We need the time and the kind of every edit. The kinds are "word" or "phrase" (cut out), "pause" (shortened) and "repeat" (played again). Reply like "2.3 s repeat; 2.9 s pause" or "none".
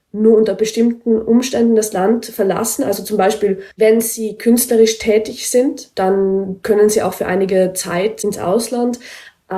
3.7 s pause